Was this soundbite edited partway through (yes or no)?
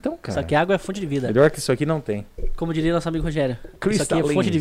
no